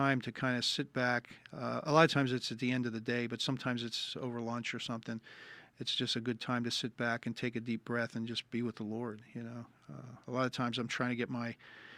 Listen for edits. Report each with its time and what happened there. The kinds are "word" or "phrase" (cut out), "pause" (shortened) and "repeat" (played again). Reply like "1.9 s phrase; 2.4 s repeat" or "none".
10.2 s pause